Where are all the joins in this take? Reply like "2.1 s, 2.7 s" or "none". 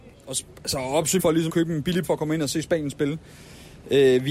1.2 s, 1.5 s, 2.0 s